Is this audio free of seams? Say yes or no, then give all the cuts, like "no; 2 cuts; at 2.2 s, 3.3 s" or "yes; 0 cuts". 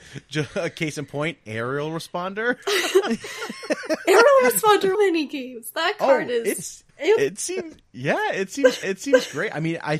no; 3 cuts; at 4.9 s, 6.9 s, 8.8 s